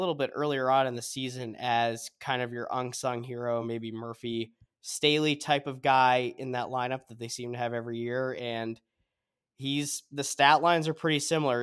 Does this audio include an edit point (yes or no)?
no